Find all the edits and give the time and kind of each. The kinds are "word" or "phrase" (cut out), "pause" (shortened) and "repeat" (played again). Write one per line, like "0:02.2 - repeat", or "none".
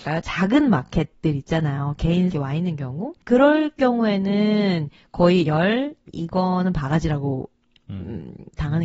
0:02.3 - phrase
0:03.2 - pause
0:05.5 - word